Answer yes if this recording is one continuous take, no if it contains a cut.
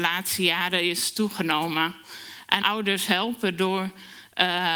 no